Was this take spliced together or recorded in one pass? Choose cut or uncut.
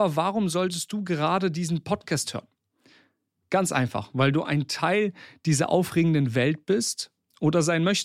uncut